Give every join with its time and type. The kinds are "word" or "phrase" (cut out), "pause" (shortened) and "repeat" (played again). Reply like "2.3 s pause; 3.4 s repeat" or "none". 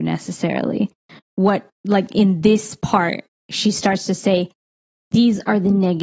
1.3 s word; 1.7 s pause